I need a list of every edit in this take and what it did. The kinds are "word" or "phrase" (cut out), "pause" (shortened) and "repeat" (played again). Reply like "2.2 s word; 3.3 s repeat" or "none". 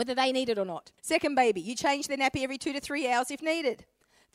1.0 s pause